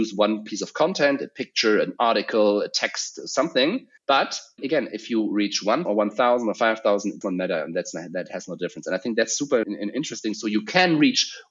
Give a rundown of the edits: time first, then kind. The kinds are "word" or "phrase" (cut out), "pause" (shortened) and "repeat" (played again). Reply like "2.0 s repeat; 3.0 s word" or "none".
4.0 s pause; 5.9 s word; 7.2 s word; 9.6 s word